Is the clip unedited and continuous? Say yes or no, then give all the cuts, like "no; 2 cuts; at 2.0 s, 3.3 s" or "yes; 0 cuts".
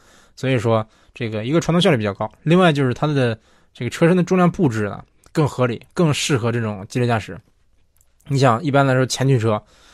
yes; 0 cuts